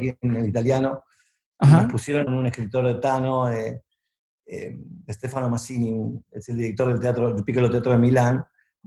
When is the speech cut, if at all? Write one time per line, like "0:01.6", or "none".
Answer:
0:02.3